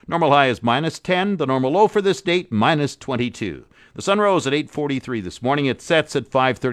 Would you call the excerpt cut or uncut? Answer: uncut